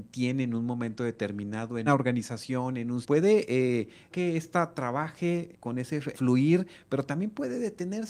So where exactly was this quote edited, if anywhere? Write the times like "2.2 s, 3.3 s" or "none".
1.9 s, 3.0 s, 4.1 s, 5.5 s, 6.1 s